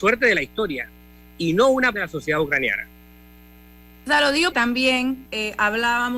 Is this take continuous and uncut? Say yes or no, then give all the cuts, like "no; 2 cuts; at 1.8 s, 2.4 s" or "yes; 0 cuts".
no; 3 cuts; at 1.9 s, 4.5 s, 5.3 s